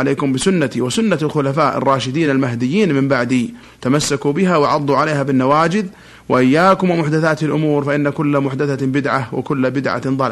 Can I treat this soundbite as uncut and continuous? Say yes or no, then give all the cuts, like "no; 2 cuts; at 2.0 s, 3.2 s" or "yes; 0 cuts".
yes; 0 cuts